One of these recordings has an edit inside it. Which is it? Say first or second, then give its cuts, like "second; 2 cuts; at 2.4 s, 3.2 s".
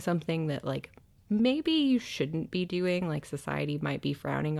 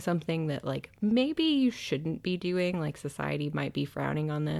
second; 1 cut; at 0.9 s